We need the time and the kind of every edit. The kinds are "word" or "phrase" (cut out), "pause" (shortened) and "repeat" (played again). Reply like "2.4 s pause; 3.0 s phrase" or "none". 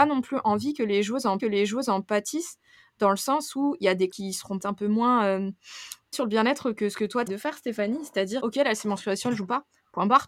1.4 s repeat; 4.1 s word; 4.6 s word; 6.1 s word; 7.3 s word; 8.4 s word